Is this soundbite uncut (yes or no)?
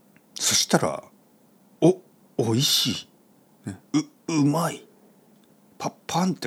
yes